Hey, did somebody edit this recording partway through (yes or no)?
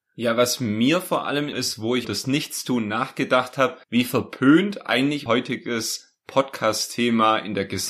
yes